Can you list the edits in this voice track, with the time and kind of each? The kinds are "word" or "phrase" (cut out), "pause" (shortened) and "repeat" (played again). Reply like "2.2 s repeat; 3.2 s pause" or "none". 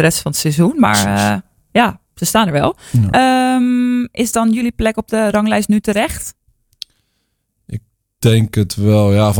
none